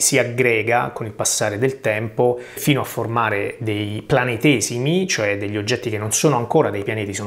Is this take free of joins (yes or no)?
yes